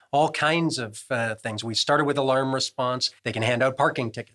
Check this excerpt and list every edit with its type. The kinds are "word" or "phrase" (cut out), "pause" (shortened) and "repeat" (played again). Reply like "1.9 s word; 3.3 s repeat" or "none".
3.2 s pause